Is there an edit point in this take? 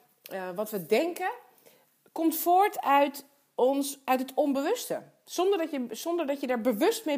no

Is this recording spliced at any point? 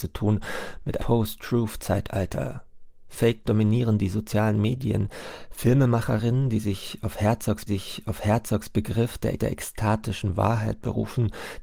yes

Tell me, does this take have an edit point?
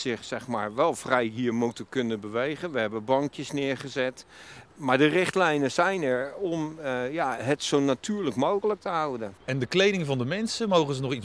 no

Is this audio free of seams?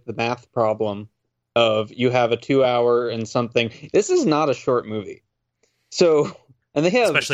yes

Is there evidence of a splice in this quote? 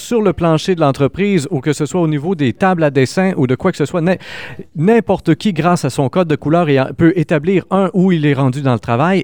no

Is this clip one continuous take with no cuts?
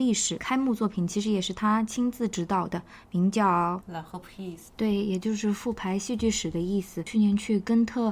yes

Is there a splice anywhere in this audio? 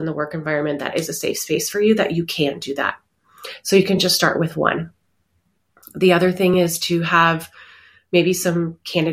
no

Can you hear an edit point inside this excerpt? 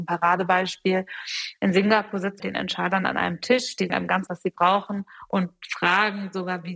yes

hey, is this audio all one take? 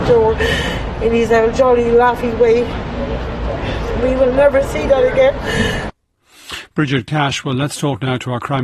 yes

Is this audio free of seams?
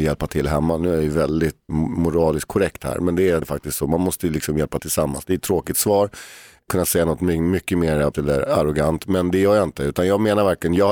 no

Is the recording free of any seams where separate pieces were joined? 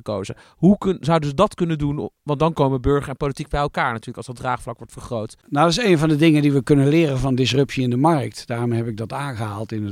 no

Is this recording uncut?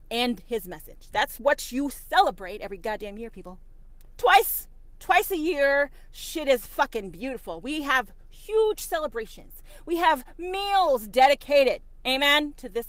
yes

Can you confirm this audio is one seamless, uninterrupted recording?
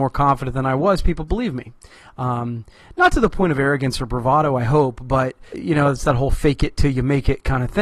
no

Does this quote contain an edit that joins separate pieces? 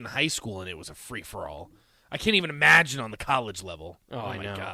no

